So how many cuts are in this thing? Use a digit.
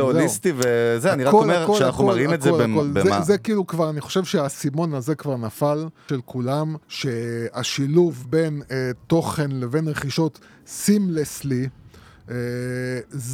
2